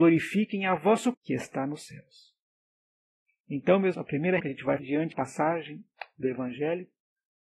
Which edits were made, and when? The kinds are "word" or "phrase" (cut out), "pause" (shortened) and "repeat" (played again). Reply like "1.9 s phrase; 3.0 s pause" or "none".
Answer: 1.1 s word; 3.9 s word; 4.4 s word; 4.8 s word; 5.1 s word